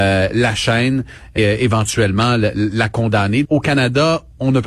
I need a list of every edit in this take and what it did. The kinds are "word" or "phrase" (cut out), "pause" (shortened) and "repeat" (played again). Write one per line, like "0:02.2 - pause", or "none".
0:01.4 - word
0:03.4 - word